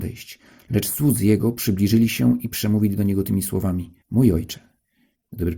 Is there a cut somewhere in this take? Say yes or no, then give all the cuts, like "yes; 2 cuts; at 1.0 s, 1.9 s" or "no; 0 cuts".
yes; 1 cut; at 4.0 s